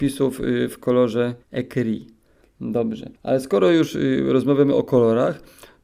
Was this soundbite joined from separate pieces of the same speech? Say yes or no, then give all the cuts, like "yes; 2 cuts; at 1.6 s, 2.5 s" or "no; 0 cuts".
yes; 2 cuts; at 1.4 s, 3.2 s